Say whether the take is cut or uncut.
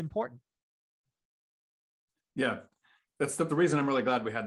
cut